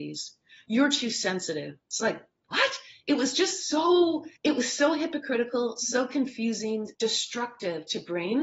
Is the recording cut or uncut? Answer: cut